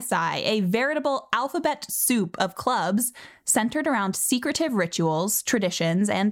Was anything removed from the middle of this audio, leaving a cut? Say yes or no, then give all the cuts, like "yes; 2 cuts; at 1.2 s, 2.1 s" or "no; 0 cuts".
no; 0 cuts